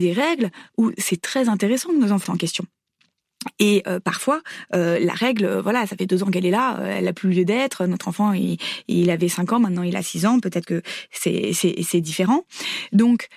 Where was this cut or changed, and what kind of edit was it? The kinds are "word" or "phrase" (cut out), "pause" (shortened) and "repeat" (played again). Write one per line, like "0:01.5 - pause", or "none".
0:02.2 - phrase